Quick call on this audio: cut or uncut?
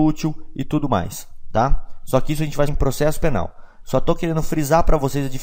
cut